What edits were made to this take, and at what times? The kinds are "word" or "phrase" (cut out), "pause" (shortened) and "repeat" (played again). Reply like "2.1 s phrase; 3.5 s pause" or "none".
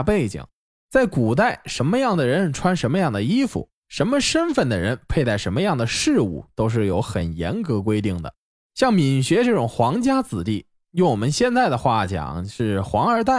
none